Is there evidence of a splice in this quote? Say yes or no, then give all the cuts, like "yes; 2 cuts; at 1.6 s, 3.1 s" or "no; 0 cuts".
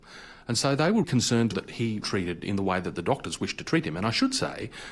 yes; 3 cuts; at 1.0 s, 1.5 s, 2.0 s